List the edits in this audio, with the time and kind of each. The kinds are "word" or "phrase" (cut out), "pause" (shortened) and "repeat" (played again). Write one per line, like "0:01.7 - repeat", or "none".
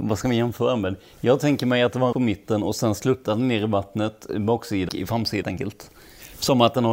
0:02.1 - word
0:04.9 - word
0:05.4 - word